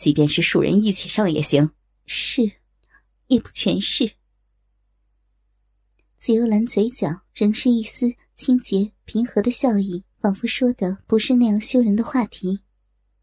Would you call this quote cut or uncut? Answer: cut